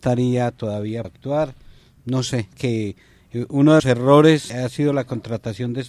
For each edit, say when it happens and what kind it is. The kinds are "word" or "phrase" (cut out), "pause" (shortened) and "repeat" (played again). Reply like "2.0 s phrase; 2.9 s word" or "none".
1.0 s word; 2.5 s word; 3.8 s word; 4.5 s word